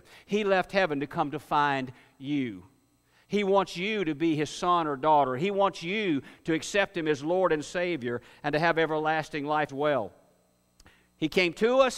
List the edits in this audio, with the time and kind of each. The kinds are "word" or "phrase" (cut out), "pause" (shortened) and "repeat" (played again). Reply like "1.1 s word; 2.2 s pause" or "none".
9.7 s word